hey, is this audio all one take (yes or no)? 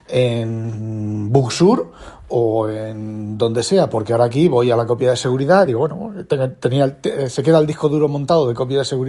yes